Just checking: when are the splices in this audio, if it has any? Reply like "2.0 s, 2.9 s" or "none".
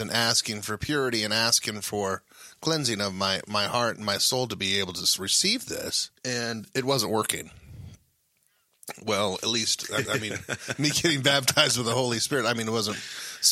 6.2 s, 10.0 s